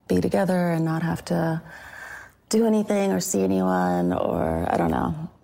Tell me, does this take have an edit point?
no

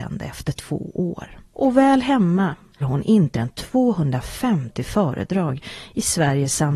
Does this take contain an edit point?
yes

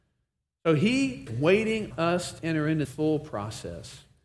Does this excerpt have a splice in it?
yes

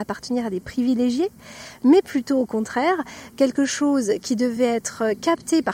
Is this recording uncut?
yes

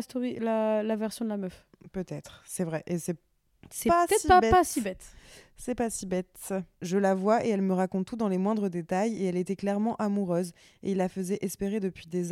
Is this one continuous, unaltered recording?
yes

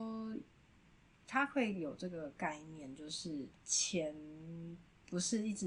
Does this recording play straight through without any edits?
no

